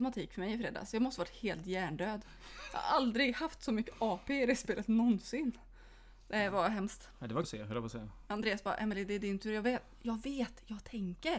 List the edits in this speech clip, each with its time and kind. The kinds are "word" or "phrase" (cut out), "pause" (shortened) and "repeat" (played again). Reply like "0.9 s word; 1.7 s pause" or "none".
7.4 s phrase